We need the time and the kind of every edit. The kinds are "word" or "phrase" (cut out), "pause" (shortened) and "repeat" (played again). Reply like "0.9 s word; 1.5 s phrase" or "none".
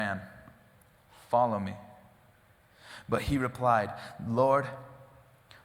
none